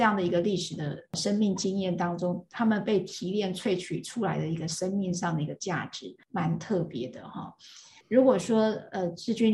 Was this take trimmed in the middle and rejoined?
no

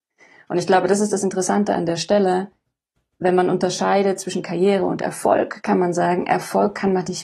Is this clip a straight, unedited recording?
yes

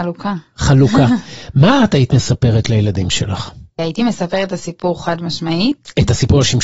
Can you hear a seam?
yes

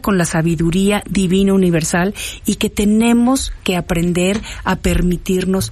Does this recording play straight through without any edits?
yes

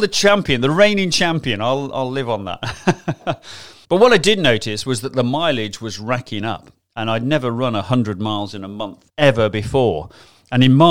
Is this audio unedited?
no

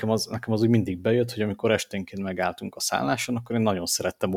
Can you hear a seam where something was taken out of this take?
no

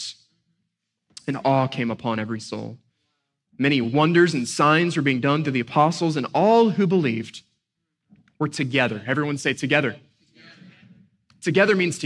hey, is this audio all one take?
yes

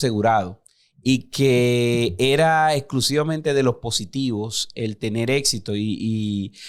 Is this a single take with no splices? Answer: yes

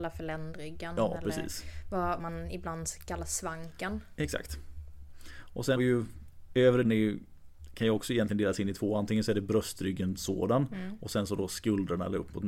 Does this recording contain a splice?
yes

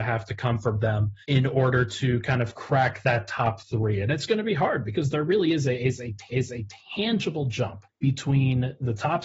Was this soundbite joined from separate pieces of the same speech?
yes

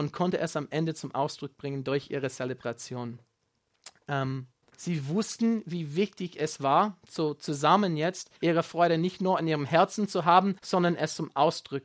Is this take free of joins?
no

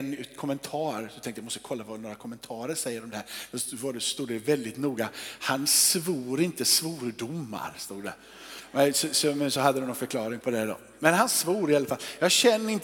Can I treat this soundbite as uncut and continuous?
yes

